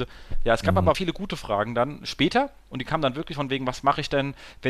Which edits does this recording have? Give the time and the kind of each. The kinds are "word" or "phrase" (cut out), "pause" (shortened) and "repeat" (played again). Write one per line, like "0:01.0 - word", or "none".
0:00.9 - word